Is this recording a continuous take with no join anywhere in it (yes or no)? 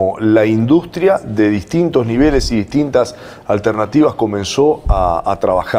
yes